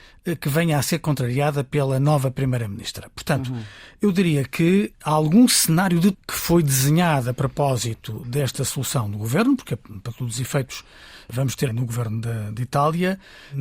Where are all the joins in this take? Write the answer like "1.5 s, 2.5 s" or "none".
5.0 s, 6.1 s, 11.7 s